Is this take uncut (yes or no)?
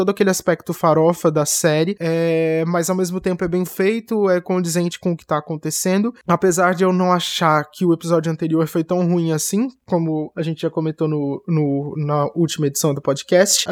yes